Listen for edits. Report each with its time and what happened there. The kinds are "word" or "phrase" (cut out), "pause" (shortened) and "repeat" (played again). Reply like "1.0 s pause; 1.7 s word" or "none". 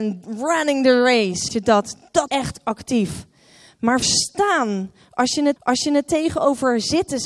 1.5 s word; 2.3 s word; 4.0 s word; 5.6 s repeat